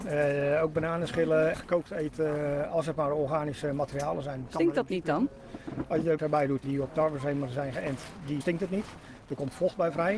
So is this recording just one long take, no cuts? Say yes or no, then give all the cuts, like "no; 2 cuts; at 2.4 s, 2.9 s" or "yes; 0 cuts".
no; 4 cuts; at 1.5 s, 6.2 s, 6.6 s, 8.4 s